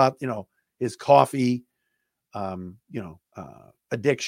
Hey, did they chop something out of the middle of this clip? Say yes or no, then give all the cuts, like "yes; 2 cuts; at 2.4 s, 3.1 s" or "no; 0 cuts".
yes; 2 cuts; at 2.8 s, 3.3 s